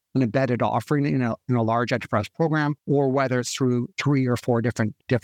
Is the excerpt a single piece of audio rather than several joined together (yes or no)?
no